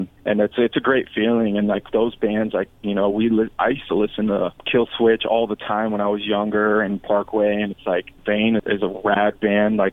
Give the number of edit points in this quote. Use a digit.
0